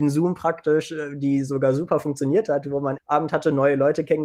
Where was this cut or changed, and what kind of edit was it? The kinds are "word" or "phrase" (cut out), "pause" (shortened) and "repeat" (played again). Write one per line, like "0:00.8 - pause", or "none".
0:03.0 - phrase